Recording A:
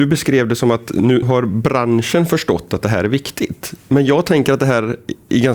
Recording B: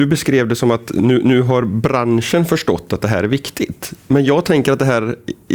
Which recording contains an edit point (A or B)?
A